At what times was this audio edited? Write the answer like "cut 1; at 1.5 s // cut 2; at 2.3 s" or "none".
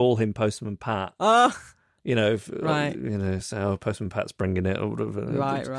none